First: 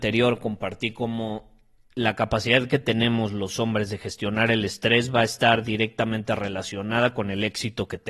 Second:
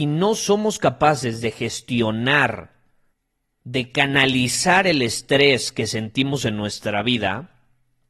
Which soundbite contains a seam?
second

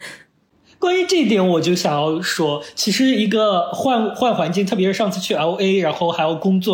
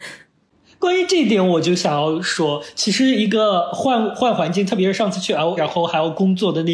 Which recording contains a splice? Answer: second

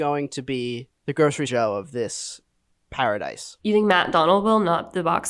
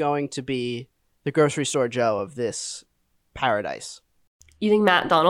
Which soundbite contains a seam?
first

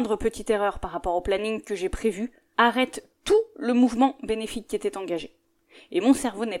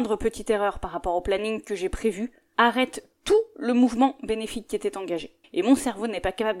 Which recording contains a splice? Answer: second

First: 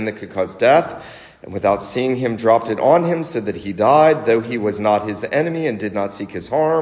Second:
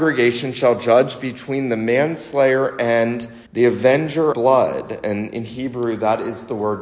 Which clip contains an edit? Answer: second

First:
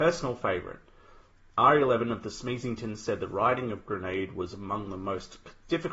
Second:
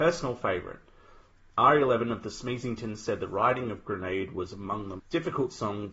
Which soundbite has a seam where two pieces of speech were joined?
second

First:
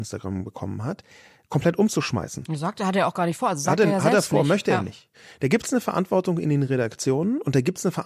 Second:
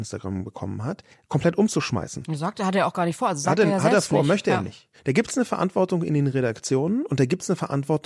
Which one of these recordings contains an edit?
second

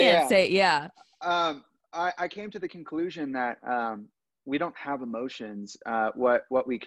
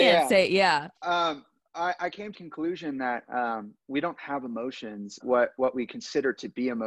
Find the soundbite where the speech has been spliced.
second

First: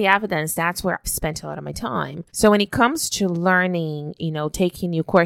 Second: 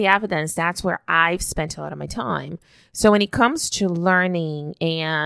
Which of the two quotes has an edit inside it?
first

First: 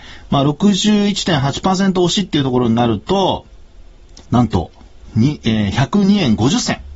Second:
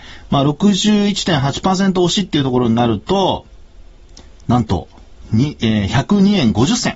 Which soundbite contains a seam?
first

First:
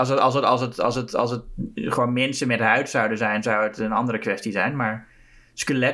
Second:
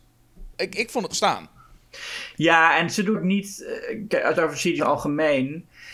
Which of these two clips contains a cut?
second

